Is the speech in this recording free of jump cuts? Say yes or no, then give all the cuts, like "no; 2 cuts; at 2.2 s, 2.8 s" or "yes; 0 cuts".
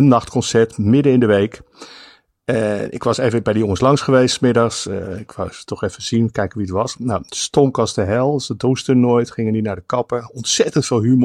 yes; 0 cuts